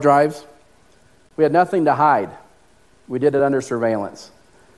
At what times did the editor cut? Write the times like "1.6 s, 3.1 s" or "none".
none